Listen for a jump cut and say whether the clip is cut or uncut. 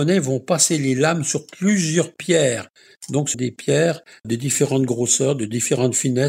cut